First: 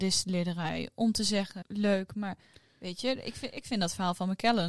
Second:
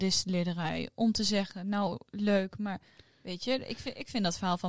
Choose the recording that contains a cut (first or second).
first